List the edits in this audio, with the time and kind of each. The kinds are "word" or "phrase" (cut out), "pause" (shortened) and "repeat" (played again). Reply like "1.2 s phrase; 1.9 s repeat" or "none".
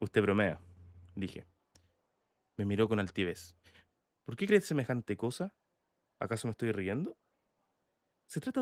none